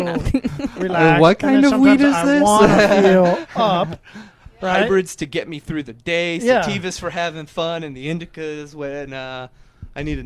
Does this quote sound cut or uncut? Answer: uncut